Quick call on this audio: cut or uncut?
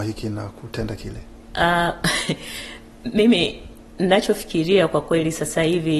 uncut